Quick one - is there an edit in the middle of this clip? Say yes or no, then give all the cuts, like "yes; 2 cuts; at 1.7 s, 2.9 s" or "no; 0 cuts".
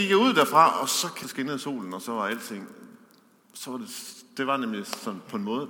yes; 1 cut; at 1.2 s